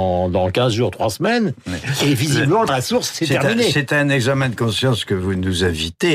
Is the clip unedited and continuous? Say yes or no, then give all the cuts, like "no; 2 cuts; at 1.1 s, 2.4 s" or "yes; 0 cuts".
no; 1 cut; at 2.7 s